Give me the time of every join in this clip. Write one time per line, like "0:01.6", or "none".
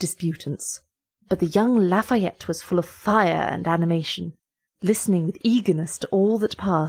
none

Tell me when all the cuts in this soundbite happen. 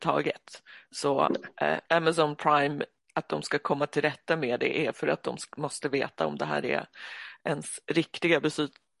0:01.9

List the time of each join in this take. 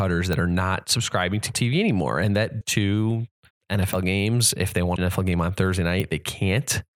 0:01.5
0:02.6
0:03.5
0:05.0

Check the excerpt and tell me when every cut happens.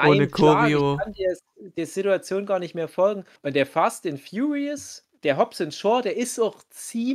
0:03.4
0:05.1

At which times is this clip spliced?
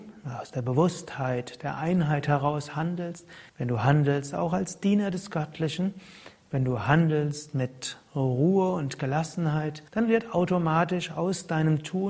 0:03.5
0:09.9

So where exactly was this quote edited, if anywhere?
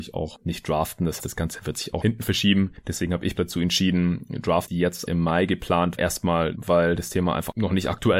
0:01.2
0:02.0
0:03.4
0:04.7
0:05.1
0:05.9
0:06.5

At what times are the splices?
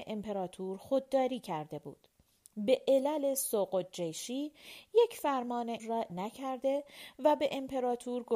0:05.8
0:06.1

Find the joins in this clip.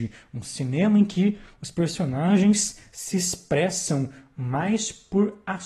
none

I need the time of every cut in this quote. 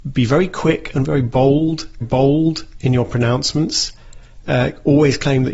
0:02.0
0:04.4

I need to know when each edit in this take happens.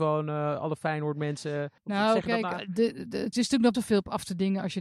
0:01.8
0:03.3
0:03.7

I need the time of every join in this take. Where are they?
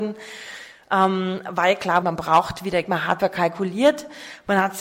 0:02.0
0:02.8
0:03.2

